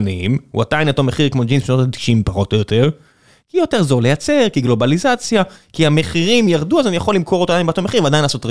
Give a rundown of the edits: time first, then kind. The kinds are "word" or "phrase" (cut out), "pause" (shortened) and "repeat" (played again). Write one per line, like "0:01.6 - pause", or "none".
none